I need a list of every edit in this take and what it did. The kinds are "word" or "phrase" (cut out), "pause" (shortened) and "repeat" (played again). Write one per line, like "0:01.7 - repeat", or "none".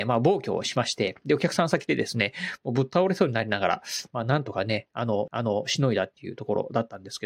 0:05.3 - repeat